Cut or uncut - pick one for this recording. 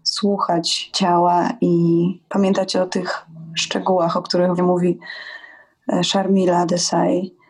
cut